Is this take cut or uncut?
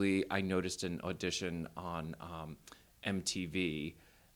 uncut